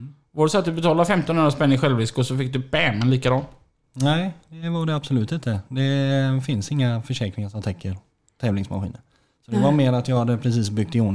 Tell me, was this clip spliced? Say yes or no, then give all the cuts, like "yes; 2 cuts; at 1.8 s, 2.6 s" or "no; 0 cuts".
no; 0 cuts